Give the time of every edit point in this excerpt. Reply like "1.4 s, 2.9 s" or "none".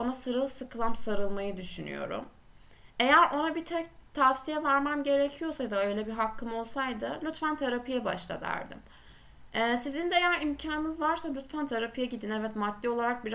none